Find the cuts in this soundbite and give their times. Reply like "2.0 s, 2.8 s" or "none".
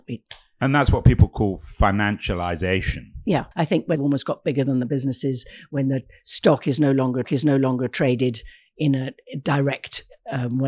3.5 s, 4.0 s, 7.2 s